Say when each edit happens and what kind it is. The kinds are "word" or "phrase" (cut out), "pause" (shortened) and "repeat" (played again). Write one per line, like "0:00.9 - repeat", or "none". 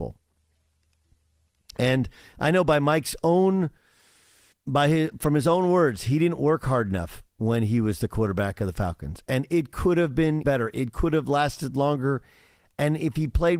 0:04.5 - word
0:10.4 - word